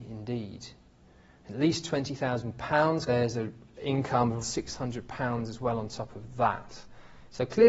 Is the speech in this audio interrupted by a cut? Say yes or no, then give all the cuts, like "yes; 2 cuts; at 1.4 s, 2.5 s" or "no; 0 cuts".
yes; 3 cuts; at 3.1 s, 3.7 s, 4.4 s